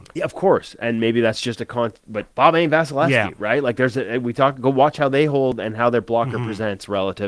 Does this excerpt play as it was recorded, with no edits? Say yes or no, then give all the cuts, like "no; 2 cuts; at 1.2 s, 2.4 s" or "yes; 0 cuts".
no; 1 cut; at 2.3 s